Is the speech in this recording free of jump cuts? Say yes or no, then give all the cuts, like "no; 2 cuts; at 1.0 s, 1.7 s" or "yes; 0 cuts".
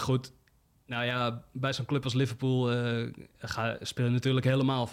yes; 0 cuts